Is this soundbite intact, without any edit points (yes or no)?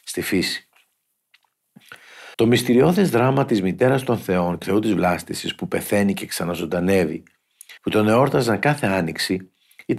no